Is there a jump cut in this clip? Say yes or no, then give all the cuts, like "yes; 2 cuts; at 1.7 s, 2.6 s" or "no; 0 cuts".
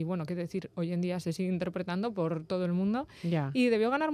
no; 0 cuts